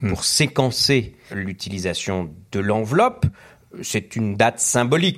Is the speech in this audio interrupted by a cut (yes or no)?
yes